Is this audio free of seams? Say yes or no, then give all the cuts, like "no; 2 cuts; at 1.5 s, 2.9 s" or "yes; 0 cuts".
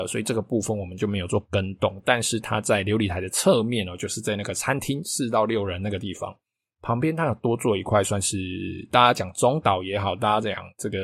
yes; 0 cuts